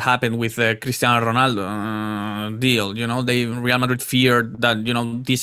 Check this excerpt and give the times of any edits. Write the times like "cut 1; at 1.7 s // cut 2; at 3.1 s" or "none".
none